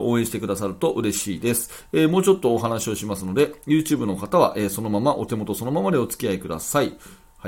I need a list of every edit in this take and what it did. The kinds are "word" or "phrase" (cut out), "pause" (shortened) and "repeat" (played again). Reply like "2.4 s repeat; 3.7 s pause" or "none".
none